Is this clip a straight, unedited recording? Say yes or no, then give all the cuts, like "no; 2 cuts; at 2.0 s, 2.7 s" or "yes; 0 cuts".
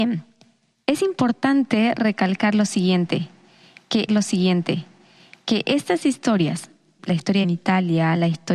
no; 3 cuts; at 4.1 s, 7.0 s, 7.4 s